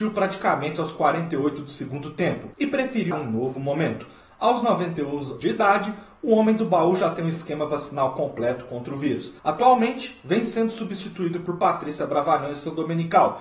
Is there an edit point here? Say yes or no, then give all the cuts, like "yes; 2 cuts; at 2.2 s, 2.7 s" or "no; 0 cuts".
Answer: yes; 4 cuts; at 2.5 s, 3.1 s, 5.4 s, 9.4 s